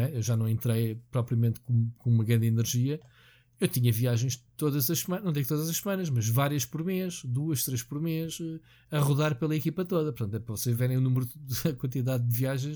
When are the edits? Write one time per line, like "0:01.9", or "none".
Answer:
none